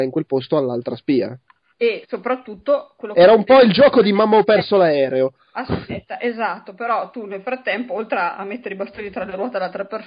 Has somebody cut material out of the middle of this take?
no; 0 cuts

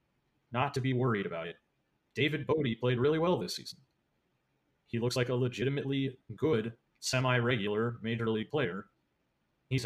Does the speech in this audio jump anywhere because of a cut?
no; 0 cuts

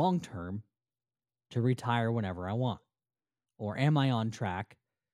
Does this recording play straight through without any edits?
yes; 0 cuts

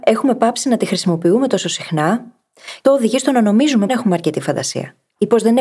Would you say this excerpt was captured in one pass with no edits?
no; 2 cuts; at 2.8 s, 3.9 s

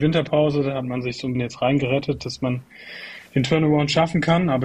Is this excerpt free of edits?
no; 1 cut; at 1.3 s

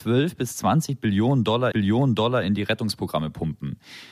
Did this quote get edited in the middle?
yes; 1 cut; at 1.7 s

